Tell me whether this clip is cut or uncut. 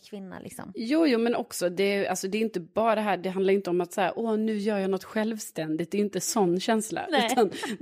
uncut